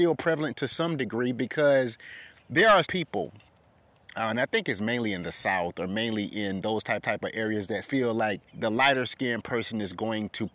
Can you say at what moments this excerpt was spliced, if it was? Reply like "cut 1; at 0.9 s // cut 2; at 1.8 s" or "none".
cut 1; at 2.8 s // cut 2; at 7.0 s // cut 3; at 7.8 s // cut 4; at 8.5 s